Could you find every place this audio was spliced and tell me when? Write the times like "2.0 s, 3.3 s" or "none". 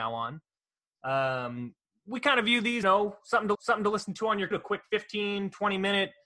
2.8 s, 3.5 s, 4.5 s